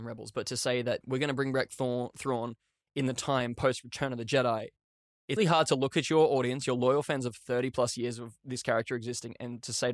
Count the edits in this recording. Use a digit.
2